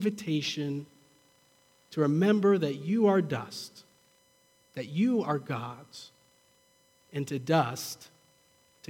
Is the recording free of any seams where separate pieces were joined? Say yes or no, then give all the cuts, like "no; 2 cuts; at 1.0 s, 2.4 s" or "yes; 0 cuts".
yes; 0 cuts